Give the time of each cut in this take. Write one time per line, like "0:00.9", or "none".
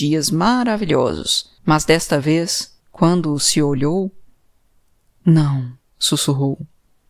0:01.6
0:02.8
0:05.8